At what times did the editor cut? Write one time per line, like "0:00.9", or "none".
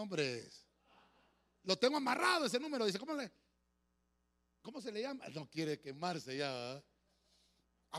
none